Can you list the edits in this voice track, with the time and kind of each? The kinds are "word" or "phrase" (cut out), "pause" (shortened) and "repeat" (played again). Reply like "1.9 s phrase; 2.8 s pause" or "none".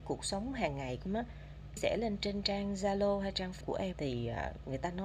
1.1 s word; 1.8 s word; 3.6 s word; 3.9 s word